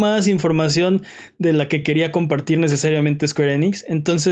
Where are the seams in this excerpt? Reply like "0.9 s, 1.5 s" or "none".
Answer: none